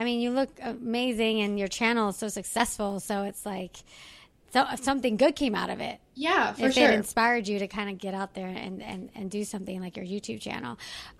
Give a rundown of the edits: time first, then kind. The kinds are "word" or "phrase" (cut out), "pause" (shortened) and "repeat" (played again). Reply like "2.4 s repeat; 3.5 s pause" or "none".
none